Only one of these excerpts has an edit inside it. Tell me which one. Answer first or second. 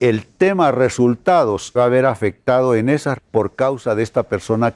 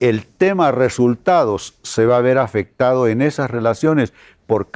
first